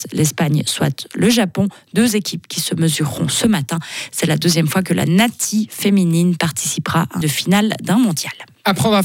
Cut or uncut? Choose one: cut